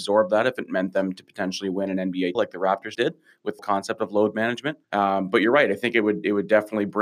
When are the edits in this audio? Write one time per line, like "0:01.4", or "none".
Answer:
0:02.3
0:02.9
0:03.6
0:04.8